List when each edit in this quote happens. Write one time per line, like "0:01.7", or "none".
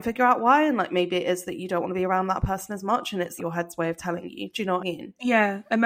0:03.4
0:04.8